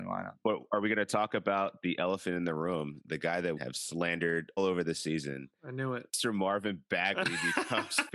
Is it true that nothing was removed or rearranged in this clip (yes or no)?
no